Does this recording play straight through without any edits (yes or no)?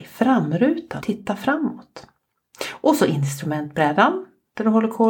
no